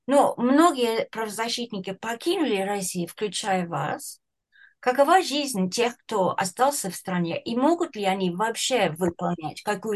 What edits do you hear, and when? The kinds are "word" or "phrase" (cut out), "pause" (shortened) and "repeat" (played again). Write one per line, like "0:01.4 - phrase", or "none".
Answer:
none